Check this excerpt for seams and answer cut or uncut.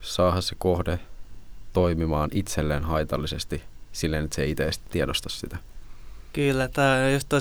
uncut